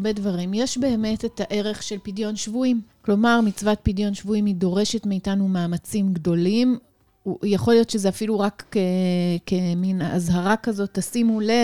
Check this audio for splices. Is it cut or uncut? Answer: cut